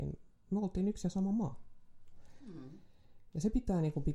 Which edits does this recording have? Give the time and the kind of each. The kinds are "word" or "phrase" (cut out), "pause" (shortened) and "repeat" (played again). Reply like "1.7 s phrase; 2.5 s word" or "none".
none